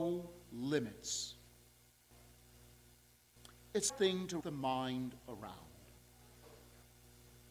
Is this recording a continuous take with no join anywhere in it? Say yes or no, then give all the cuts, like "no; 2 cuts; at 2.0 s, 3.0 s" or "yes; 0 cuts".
no; 2 cuts; at 3.9 s, 4.4 s